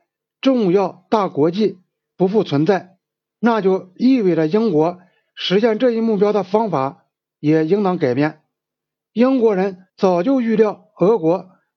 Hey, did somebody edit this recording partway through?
yes; 1 cut; at 9.9 s

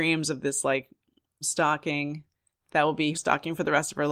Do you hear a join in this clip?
yes; 2 cuts; at 1.4 s, 3.1 s

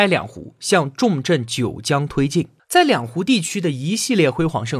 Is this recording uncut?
no; 1 cut; at 2.6 s

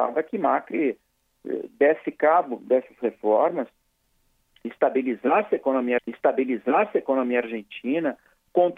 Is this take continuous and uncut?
no; 1 cut; at 6.0 s

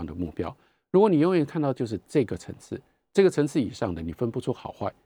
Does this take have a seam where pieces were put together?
no; 0 cuts

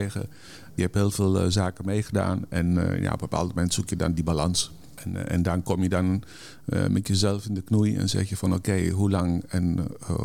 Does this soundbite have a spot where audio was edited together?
no; 0 cuts

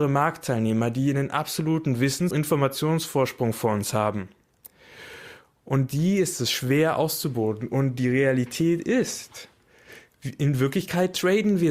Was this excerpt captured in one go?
no; 1 cut; at 2.3 s

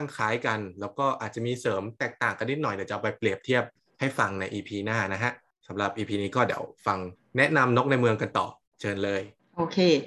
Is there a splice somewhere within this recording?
no; 0 cuts

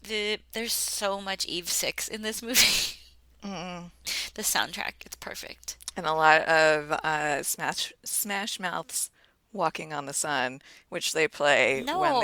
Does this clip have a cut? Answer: no; 0 cuts

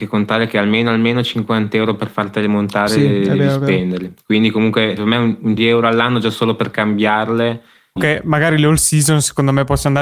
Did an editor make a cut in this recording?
yes; 3 cuts; at 5.0 s, 5.6 s, 8.0 s

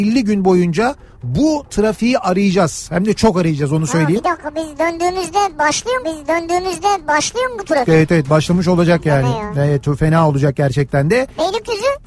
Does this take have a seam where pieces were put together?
yes; 1 cut; at 6.0 s

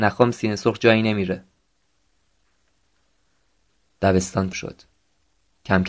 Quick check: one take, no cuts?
no; 1 cut; at 4.5 s

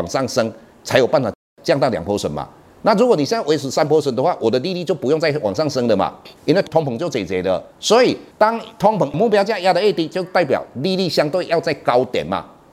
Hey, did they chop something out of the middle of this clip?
yes; 3 cuts; at 6.4 s, 7.7 s, 8.3 s

